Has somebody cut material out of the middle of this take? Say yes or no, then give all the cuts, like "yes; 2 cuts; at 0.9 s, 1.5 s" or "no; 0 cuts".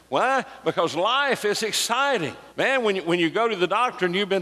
yes; 1 cut; at 2.5 s